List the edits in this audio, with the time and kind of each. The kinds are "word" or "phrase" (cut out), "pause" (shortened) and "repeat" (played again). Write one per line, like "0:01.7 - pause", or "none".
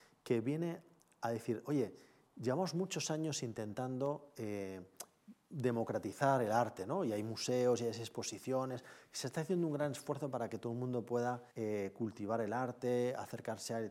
0:11.5 - pause